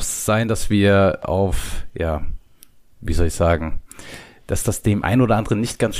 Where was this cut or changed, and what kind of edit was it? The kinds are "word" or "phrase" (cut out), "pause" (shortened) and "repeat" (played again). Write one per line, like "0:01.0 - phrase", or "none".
none